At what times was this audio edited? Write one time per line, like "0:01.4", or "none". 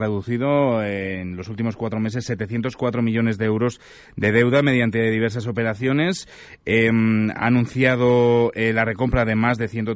none